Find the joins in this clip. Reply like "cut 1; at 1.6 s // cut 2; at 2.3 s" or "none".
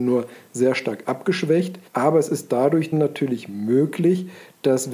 cut 1; at 1.9 s // cut 2; at 2.9 s